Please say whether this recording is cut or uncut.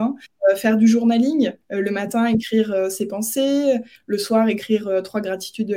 cut